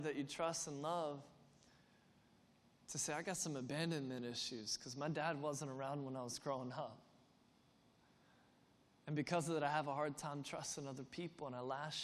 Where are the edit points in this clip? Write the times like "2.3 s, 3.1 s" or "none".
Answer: none